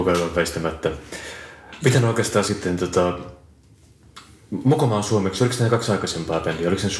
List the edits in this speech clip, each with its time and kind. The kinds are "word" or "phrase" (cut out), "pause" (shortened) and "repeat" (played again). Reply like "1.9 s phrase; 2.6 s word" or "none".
none